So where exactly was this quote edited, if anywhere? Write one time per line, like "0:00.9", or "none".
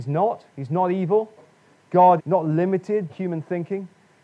0:02.2
0:03.1